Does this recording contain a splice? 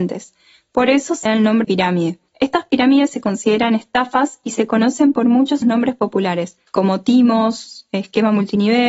yes; 5 cuts; at 1.3 s, 1.6 s, 2.3 s, 5.6 s, 6.7 s

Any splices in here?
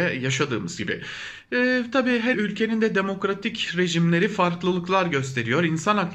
yes; 1 cut; at 2.3 s

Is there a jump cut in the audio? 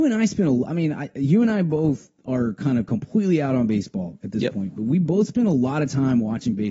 no; 0 cuts

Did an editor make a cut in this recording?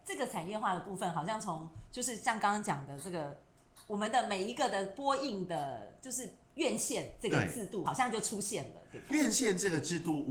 yes; 1 cut; at 9.1 s

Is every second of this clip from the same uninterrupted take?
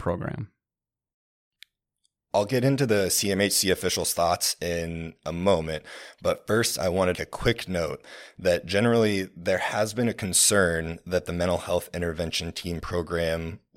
no; 1 cut; at 7.1 s

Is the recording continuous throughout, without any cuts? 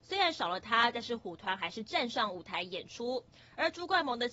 yes; 0 cuts

